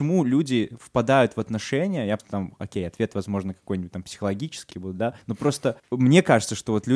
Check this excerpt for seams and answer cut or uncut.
cut